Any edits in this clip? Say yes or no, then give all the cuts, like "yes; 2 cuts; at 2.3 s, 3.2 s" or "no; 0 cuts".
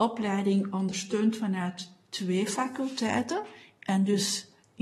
no; 0 cuts